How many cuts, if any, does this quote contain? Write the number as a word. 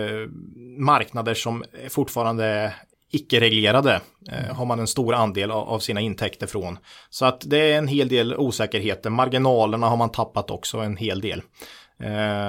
zero